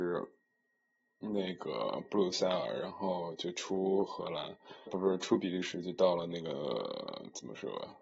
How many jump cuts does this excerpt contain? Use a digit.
1